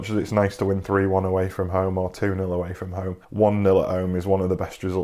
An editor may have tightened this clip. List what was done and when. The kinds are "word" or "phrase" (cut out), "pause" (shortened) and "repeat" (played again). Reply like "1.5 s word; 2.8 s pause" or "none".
3.2 s pause